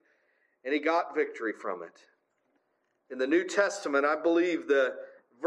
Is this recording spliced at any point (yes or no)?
yes